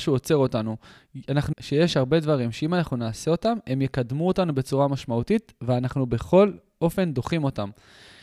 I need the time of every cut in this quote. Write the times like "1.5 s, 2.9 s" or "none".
1.5 s